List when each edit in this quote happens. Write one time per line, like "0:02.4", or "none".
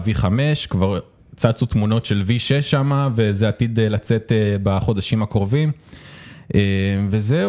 none